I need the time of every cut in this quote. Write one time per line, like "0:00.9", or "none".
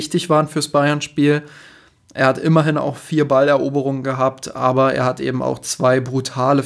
none